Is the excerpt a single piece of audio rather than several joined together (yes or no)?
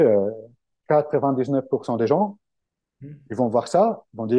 yes